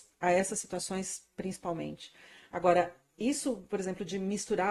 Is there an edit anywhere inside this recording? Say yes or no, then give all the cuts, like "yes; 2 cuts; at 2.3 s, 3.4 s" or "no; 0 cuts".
no; 0 cuts